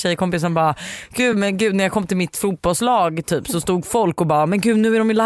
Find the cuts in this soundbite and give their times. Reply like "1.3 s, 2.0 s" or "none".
none